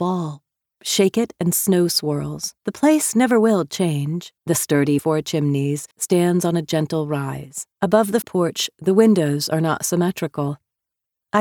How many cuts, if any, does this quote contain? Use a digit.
6